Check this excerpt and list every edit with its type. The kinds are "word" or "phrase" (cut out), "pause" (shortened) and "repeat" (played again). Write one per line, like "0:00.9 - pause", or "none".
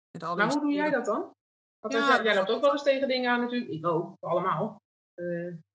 none